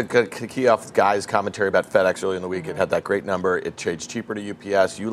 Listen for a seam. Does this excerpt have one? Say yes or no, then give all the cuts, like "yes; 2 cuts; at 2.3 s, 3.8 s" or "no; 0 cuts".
no; 0 cuts